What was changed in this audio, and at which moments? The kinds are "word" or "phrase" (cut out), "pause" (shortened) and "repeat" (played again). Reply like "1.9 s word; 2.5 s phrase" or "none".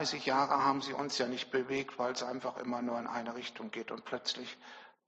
none